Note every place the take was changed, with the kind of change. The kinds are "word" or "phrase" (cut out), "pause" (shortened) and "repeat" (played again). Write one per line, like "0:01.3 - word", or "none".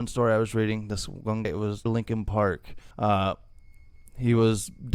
0:01.4 - word
0:01.9 - phrase
0:02.9 - pause